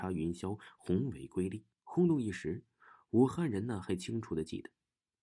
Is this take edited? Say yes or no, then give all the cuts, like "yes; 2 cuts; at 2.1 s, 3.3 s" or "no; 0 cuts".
yes; 1 cut; at 1.7 s